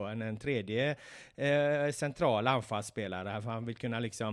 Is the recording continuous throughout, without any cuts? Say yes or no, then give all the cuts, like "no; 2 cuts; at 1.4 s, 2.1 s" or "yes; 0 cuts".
yes; 0 cuts